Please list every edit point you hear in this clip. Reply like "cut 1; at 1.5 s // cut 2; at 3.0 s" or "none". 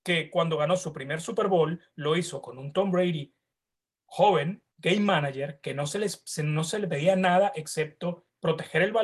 cut 1; at 4.7 s